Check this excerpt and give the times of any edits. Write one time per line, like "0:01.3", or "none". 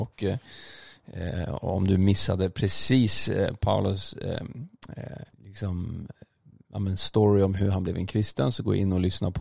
0:05.3